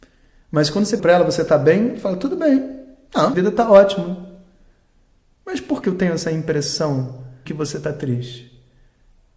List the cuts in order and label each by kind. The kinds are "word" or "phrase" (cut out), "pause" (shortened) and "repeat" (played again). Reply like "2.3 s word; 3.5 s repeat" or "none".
1.0 s word; 3.3 s word; 5.8 s word; 7.5 s word